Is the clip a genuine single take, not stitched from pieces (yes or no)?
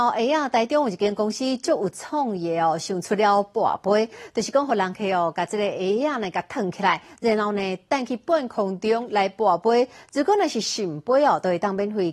yes